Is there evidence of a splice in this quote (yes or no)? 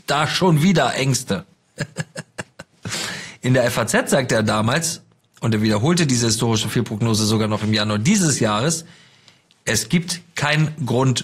no